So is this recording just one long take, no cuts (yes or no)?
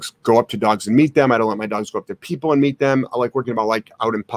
no